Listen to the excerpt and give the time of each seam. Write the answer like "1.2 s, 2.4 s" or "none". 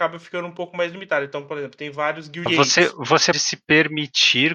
2.5 s, 3.3 s